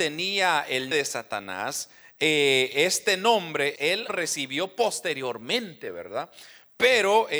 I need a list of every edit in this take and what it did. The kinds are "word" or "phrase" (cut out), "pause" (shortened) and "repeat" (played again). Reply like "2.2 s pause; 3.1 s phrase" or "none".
0.9 s word; 3.7 s word; 4.1 s word